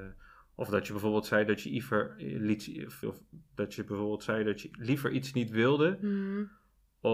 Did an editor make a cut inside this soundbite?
yes; 2 cuts; at 3.0 s, 4.7 s

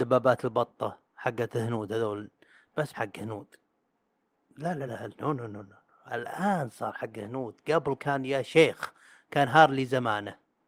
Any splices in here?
yes; 3 cuts; at 1.1 s, 2.9 s, 4.9 s

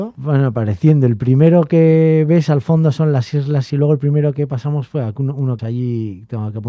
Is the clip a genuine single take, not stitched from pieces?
no; 2 cuts; at 3.7 s, 5.6 s

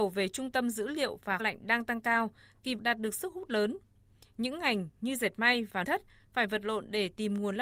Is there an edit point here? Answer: yes; 3 cuts; at 1.4 s, 2.8 s, 5.8 s

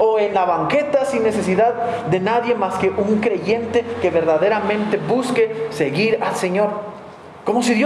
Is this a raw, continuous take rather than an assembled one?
yes; 0 cuts

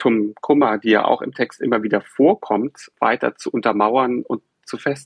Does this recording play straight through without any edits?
yes; 0 cuts

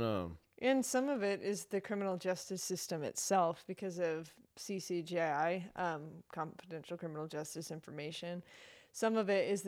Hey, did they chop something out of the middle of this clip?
no; 0 cuts

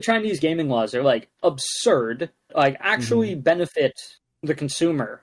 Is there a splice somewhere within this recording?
yes; 1 cut; at 2.5 s

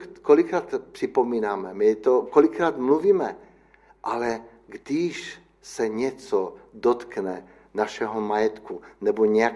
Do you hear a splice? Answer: no; 0 cuts

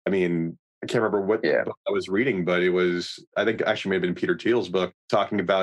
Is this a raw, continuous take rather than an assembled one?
yes; 0 cuts

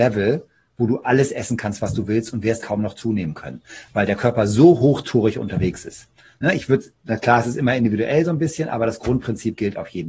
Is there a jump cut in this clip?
yes; 1 cut; at 2.6 s

